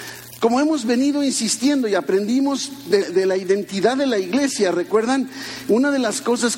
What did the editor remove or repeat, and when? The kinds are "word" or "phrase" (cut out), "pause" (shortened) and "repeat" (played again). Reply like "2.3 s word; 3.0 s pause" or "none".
3.0 s word